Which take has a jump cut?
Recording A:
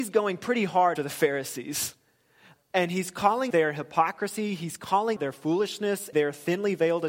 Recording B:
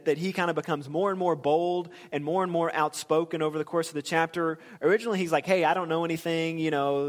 A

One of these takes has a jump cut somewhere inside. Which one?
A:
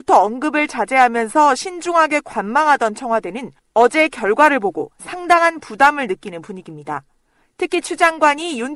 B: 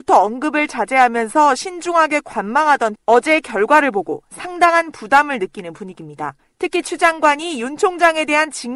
B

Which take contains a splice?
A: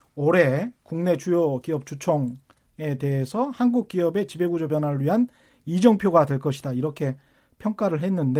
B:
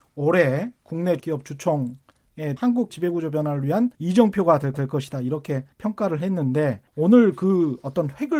B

